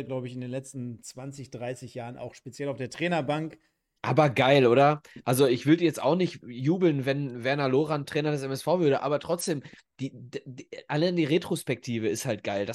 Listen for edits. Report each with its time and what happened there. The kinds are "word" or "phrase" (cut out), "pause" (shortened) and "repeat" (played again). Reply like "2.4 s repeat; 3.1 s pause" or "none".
none